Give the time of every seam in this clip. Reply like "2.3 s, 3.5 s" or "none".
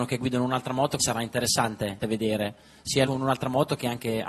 1.0 s, 2.0 s, 3.0 s